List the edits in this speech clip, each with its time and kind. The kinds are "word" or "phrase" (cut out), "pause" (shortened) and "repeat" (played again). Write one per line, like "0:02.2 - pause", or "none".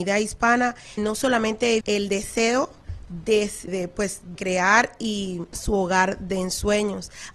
0:01.0 - word
0:01.8 - word
0:03.7 - word
0:04.4 - word
0:05.5 - word